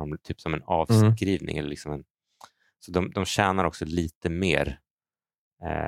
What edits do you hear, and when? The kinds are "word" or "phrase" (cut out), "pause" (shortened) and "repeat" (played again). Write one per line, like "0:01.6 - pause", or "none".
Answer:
none